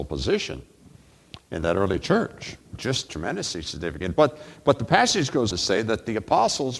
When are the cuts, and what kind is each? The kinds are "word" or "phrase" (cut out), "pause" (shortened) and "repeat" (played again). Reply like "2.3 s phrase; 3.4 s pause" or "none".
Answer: 2.7 s pause; 5.5 s word